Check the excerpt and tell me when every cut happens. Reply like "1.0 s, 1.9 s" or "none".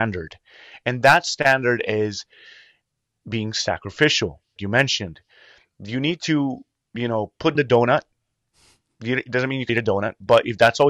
4.6 s, 7.5 s, 9.7 s